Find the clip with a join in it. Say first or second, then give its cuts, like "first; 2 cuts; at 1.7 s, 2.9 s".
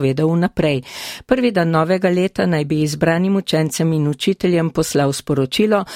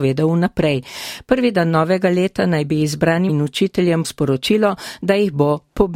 second; 2 cuts; at 3.3 s, 4.0 s